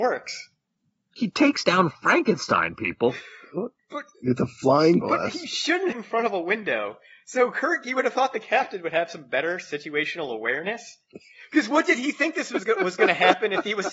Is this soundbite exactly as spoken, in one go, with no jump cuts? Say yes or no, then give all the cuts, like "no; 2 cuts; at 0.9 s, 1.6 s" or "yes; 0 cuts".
no; 2 cuts; at 5.0 s, 5.9 s